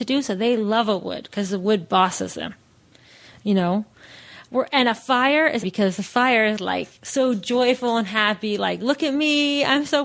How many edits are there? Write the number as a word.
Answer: one